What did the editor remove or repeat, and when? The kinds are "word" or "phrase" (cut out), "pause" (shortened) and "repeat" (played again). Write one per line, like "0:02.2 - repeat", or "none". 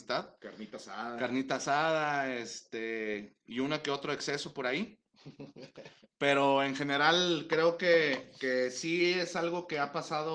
none